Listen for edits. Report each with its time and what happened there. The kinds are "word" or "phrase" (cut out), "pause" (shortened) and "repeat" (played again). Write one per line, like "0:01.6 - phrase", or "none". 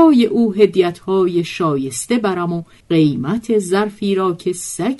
0:02.8 - pause